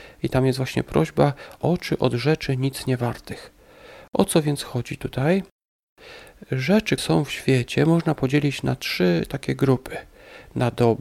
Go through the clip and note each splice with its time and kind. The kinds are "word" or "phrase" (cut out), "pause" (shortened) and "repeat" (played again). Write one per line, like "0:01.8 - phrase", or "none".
0:01.6 - word
0:07.0 - word

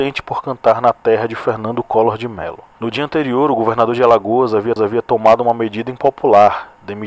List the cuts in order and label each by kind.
0:04.8 - repeat

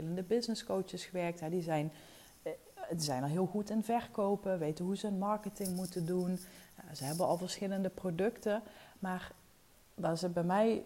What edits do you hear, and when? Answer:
none

